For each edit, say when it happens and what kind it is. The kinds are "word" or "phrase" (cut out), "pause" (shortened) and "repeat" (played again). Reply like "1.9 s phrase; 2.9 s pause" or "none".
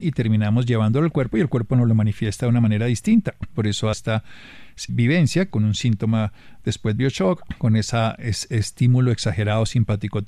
3.9 s phrase; 4.9 s word; 5.5 s word; 7.0 s word